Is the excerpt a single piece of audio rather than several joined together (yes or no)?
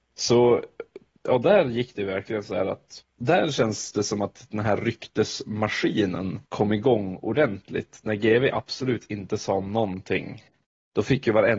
no